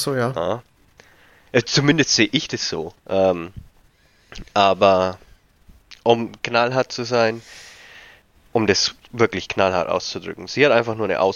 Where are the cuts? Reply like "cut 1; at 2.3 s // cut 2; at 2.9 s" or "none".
cut 1; at 3.0 s // cut 2; at 8.4 s